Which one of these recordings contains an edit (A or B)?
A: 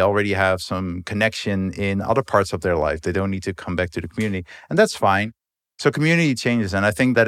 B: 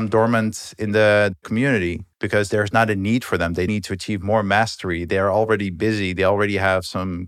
B